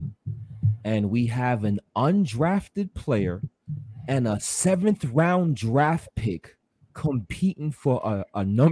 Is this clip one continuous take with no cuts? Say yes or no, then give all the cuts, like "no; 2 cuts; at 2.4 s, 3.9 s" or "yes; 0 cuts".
yes; 0 cuts